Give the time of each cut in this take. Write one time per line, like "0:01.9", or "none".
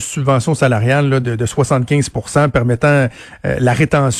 0:01.2